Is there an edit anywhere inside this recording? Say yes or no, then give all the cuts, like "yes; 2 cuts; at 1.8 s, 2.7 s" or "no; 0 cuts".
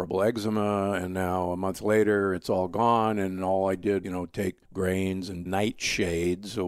yes; 3 cuts; at 4.0 s, 4.6 s, 5.5 s